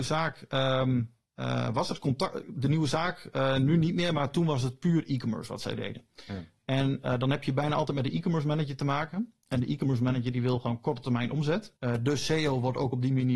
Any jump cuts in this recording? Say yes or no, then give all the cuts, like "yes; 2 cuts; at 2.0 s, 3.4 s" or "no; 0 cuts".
yes; 2 cuts; at 1.3 s, 11.8 s